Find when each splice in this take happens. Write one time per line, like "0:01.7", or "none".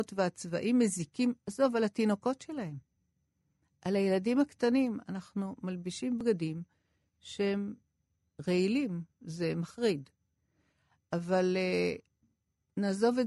none